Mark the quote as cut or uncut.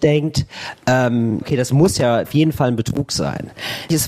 cut